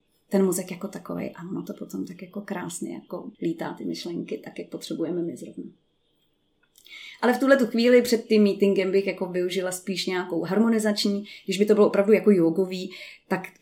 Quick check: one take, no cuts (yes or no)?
no